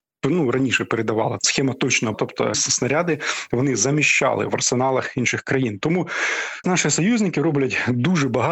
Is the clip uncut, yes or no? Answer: no